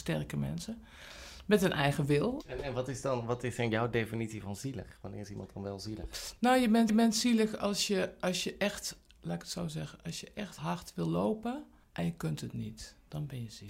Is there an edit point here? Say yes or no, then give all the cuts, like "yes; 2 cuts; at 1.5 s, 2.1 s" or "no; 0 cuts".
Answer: yes; 3 cuts; at 6.9 s, 10.6 s, 11.8 s